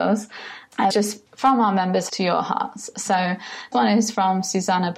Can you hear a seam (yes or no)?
yes